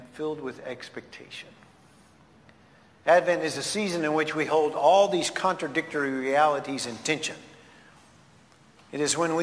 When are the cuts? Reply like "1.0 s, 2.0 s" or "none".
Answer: none